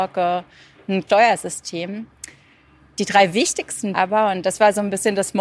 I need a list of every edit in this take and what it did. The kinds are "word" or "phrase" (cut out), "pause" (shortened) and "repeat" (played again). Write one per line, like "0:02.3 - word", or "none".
0:01.1 - word
0:03.9 - word